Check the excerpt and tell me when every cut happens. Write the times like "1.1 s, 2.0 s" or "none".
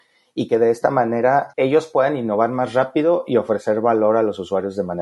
none